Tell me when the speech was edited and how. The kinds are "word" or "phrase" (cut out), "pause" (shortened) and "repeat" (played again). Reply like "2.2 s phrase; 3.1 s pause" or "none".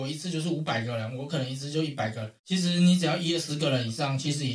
2.4 s pause